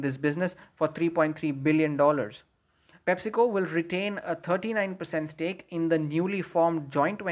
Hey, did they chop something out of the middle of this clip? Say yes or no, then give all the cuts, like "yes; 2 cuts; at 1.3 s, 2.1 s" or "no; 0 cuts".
no; 0 cuts